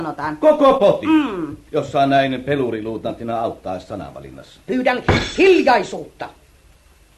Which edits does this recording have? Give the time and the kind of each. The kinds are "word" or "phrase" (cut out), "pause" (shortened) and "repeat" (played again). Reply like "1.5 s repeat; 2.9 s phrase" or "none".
1.7 s pause